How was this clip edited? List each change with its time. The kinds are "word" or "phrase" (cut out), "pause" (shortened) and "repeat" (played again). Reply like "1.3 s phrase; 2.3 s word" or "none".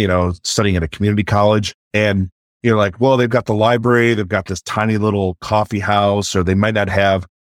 1.8 s pause